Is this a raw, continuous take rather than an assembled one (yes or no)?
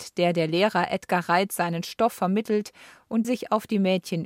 no